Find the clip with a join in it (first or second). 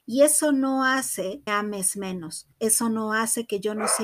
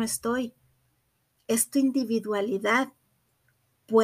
first